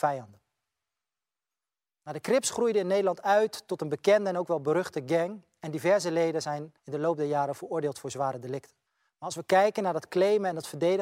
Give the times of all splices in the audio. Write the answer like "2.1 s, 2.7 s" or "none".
6.8 s, 8.9 s